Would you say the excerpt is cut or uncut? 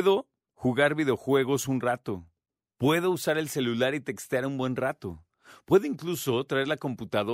cut